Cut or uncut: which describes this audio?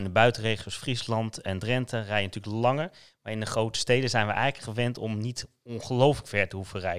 uncut